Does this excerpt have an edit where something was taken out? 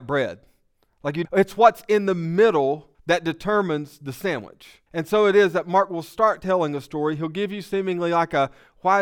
yes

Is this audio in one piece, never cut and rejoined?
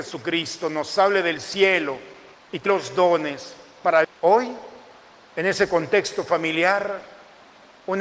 no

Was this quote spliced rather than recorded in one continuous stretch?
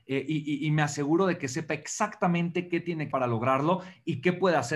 yes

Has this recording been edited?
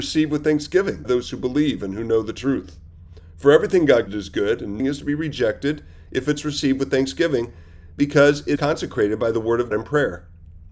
yes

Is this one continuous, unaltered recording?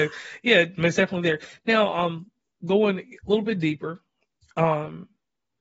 yes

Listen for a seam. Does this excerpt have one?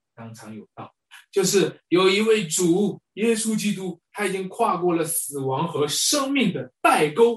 yes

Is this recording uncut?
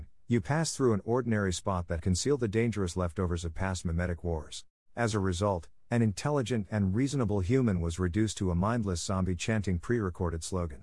no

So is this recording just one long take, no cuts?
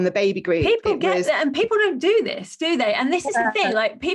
yes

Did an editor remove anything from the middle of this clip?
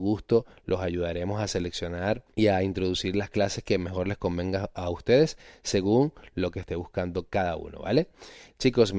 yes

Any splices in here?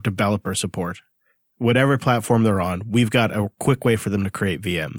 no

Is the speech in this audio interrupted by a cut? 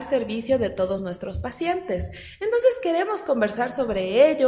no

